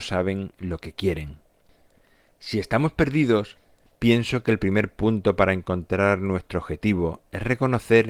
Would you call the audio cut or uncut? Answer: uncut